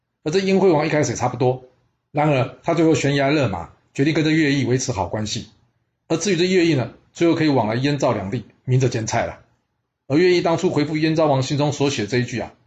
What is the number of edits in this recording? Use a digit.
0